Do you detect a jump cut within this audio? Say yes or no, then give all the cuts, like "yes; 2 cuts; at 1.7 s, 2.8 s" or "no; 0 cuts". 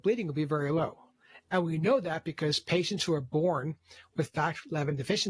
no; 0 cuts